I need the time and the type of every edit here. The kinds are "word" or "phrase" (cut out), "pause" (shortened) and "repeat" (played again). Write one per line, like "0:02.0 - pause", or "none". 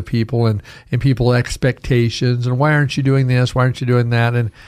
none